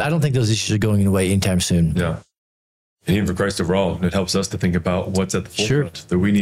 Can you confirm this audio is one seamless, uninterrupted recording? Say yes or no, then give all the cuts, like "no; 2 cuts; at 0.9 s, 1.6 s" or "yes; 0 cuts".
yes; 0 cuts